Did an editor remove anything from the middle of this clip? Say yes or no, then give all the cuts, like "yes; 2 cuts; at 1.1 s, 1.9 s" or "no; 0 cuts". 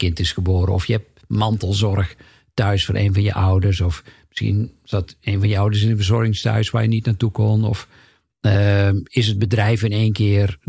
no; 0 cuts